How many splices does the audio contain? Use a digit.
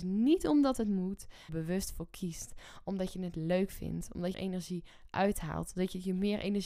2